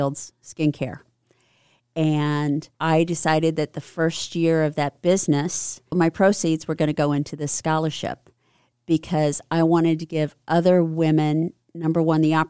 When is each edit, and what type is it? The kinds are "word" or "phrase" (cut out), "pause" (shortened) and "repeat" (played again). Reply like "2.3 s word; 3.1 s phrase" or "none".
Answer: 2.7 s pause; 5.9 s word